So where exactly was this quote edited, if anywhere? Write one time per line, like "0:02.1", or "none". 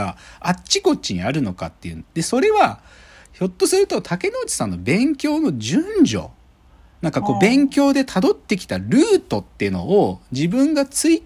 none

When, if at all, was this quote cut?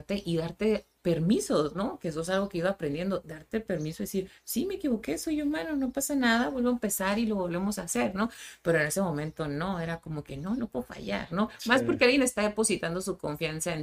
none

